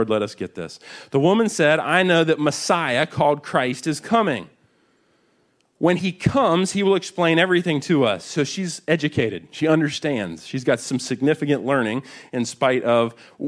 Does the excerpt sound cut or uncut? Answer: uncut